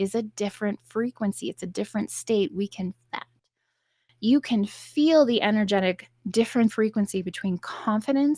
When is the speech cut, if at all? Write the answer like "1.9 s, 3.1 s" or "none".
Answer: 3.1 s, 6.7 s